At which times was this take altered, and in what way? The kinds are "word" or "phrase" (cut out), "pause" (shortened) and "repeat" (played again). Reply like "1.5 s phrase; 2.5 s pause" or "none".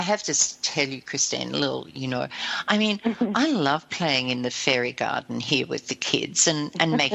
none